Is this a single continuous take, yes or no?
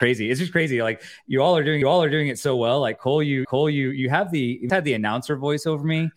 no